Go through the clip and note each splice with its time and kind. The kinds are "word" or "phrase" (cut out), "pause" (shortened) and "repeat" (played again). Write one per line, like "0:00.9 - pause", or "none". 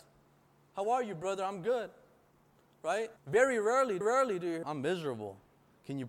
0:03.2 - pause
0:04.0 - repeat
0:04.6 - phrase